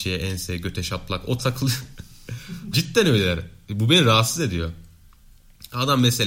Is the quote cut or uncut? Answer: cut